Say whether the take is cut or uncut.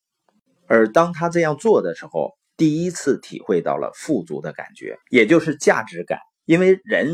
cut